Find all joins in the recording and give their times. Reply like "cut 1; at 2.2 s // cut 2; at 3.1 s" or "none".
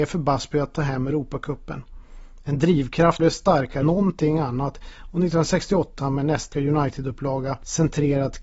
cut 1; at 3.2 s // cut 2; at 3.8 s // cut 3; at 6.0 s // cut 4; at 6.5 s